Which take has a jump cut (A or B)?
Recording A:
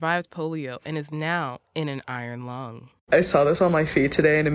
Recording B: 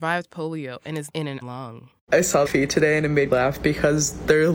B